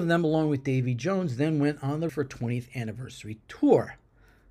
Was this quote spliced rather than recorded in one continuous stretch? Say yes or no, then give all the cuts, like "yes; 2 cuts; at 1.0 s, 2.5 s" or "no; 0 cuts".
yes; 1 cut; at 2.1 s